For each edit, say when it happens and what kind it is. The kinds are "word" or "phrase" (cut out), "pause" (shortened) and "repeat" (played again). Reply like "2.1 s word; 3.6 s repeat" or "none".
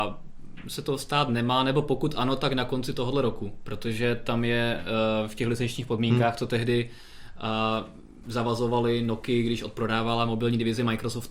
none